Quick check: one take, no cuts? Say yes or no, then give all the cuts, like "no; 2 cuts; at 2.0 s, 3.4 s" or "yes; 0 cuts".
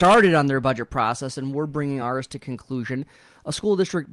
yes; 0 cuts